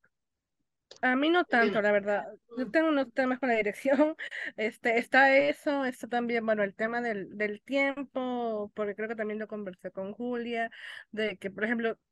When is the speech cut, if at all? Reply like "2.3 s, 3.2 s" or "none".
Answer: 1.0 s